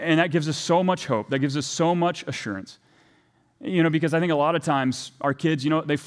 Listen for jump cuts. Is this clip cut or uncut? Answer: uncut